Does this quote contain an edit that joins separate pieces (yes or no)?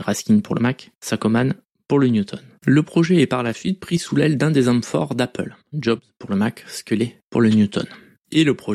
no